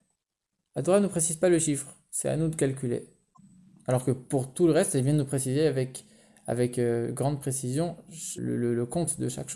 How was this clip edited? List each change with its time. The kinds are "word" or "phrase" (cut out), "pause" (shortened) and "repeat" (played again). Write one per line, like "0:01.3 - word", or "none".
0:08.4 - word